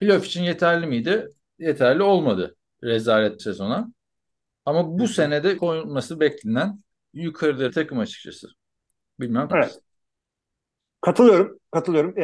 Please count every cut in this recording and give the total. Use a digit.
5